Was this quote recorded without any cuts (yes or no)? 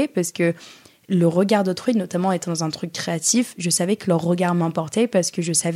yes